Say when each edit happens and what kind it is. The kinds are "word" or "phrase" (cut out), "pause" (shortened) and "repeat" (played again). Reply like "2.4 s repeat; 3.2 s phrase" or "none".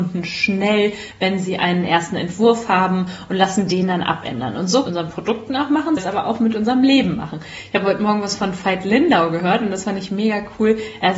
4.9 s phrase; 6.0 s phrase